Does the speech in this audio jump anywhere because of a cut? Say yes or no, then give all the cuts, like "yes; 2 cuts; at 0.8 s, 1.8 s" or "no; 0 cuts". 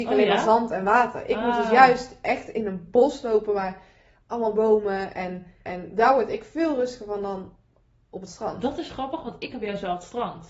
yes; 1 cut; at 5.7 s